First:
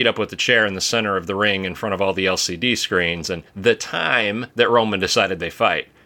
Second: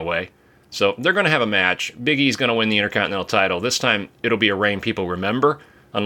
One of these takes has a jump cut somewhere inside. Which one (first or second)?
first